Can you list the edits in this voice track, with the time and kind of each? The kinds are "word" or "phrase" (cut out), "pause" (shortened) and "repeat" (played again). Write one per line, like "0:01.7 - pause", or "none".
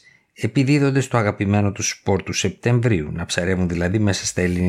none

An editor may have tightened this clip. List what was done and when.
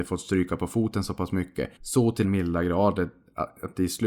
0:01.8 - pause
0:02.2 - word

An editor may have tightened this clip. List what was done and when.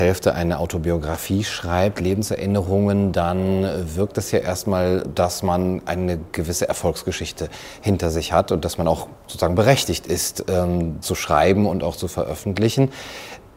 0:05.0 - word
0:11.0 - word

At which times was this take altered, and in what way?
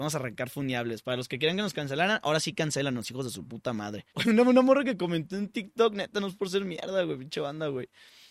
0:04.1 - pause

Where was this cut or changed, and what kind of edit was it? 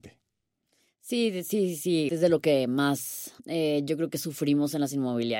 0:02.1 - word
0:03.4 - pause

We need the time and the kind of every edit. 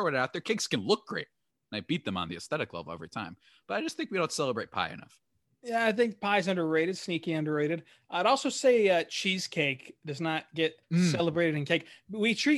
0:10.8 - pause

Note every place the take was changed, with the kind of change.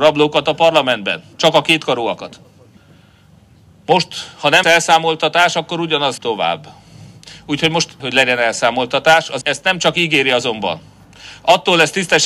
0:01.3 - pause
0:02.8 - pause
0:04.6 - word
0:06.2 - word
0:08.0 - word
0:09.4 - word

